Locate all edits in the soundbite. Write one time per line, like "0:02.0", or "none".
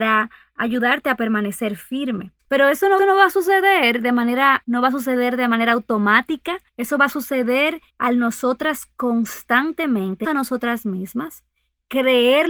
0:02.4
0:03.0
0:04.6
0:06.7
0:07.9
0:10.2